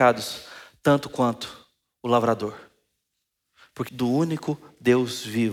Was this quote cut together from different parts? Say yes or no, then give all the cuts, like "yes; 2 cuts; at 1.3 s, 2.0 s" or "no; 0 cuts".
yes; 1 cut; at 3.9 s